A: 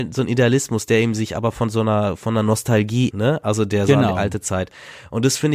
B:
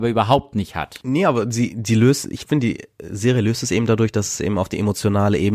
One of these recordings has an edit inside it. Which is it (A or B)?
A